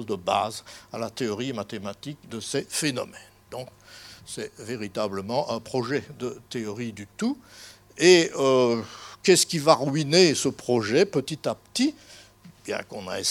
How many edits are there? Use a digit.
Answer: 0